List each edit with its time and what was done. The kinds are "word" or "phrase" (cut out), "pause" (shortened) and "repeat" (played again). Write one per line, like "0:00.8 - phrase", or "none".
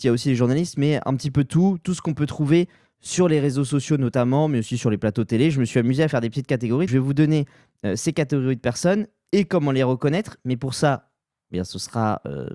0:06.9 - word